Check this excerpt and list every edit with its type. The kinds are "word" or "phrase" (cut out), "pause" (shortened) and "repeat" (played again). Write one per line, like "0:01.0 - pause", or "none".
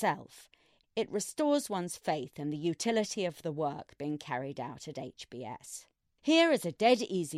none